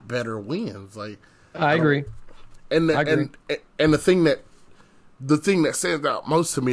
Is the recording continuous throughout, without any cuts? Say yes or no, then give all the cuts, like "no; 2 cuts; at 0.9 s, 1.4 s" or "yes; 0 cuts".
yes; 0 cuts